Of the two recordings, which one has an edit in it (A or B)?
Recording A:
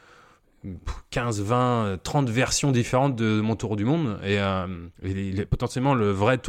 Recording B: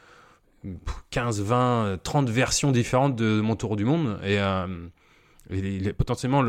A